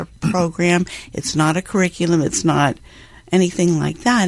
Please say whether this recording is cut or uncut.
uncut